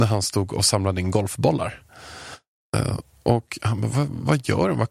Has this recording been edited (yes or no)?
no